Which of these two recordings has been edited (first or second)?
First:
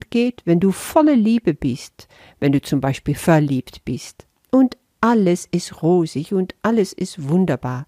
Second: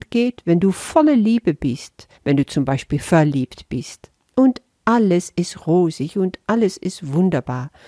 second